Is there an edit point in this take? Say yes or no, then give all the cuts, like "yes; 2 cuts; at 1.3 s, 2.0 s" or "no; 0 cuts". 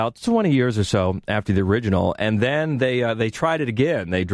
no; 0 cuts